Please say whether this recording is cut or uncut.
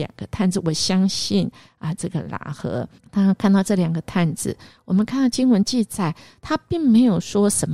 cut